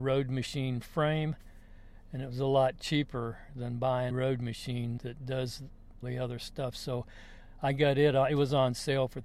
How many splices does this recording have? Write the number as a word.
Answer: three